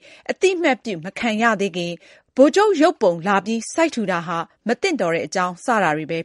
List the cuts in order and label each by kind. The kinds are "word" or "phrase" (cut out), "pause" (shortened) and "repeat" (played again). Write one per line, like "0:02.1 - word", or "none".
none